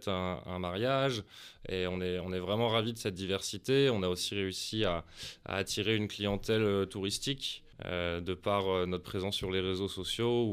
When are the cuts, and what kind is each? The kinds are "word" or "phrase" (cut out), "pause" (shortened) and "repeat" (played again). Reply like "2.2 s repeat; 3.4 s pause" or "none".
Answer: 7.7 s pause